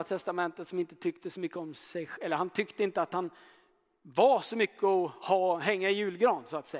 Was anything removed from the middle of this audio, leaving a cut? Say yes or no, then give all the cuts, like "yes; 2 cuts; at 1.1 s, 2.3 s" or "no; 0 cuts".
no; 0 cuts